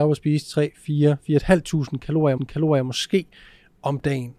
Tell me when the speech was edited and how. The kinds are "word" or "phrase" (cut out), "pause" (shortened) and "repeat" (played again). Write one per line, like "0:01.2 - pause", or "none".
0:02.4 - repeat